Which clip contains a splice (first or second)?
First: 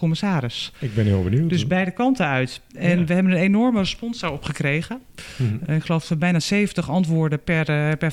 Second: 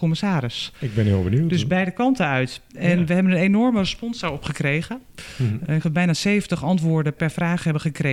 second